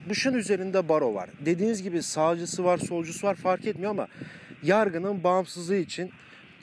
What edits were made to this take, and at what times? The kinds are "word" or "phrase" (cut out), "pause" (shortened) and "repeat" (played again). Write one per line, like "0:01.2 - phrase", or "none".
none